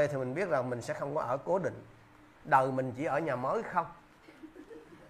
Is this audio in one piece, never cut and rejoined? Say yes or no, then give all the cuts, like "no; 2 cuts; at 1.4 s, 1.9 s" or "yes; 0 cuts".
yes; 0 cuts